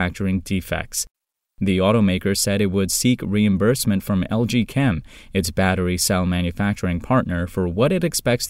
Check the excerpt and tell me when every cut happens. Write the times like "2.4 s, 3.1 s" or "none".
none